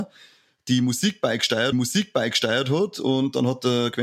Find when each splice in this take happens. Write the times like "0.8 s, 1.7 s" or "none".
1.7 s